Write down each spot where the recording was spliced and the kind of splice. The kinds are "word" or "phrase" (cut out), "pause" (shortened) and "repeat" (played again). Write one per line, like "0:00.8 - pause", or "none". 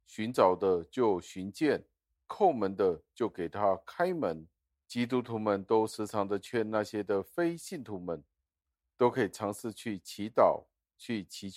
none

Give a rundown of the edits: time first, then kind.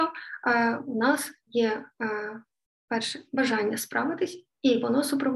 none

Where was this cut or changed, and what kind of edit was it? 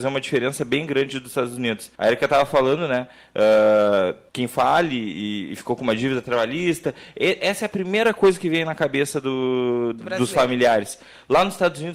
0:02.0 - pause
0:04.3 - pause

